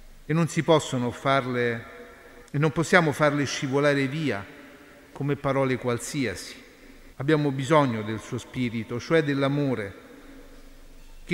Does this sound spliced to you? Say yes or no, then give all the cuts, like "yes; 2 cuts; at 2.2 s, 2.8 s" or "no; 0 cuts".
yes; 2 cuts; at 2.5 s, 7.1 s